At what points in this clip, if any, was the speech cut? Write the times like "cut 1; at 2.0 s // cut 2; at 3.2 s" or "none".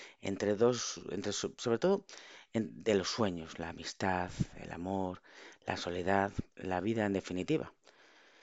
cut 1; at 6.5 s